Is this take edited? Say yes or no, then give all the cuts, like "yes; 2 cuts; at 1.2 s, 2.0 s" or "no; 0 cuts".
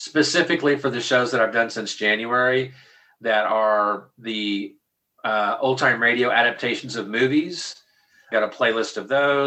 no; 0 cuts